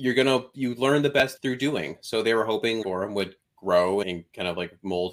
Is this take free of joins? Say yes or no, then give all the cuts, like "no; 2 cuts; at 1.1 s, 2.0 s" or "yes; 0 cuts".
no; 3 cuts; at 1.4 s, 2.8 s, 4.0 s